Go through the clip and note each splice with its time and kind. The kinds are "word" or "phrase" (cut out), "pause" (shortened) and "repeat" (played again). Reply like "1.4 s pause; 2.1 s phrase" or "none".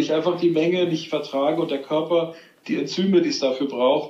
none